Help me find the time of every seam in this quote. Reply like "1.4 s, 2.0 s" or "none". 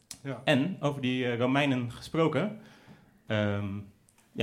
none